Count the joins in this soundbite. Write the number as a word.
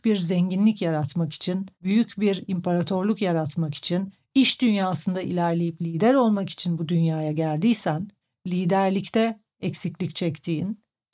two